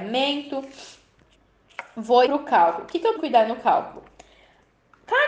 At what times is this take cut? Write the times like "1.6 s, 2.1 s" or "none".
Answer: 2.3 s, 3.2 s